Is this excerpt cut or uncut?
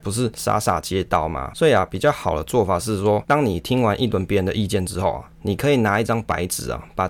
uncut